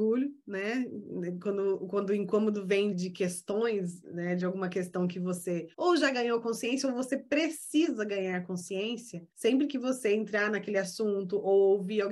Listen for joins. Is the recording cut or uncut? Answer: cut